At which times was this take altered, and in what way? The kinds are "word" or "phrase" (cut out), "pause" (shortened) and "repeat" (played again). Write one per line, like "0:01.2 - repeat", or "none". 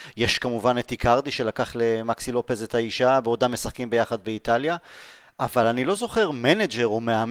none